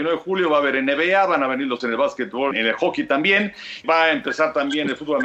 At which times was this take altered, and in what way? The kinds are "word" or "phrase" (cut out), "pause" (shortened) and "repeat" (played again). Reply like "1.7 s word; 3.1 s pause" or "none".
1.8 s word; 2.5 s word; 3.8 s word